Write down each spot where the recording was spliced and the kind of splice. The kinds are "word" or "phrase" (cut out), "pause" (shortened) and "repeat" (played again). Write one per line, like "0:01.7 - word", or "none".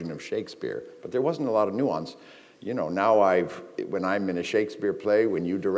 none